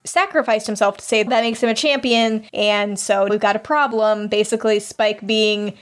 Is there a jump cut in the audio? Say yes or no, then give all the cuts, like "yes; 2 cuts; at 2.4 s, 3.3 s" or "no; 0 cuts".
yes; 3 cuts; at 1.3 s, 2.5 s, 3.3 s